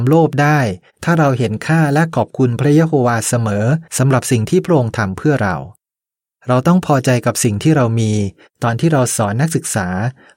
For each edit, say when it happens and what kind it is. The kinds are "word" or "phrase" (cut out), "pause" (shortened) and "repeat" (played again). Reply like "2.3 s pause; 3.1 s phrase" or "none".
3.9 s pause